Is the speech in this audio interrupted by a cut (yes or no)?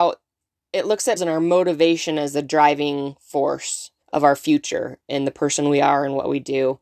yes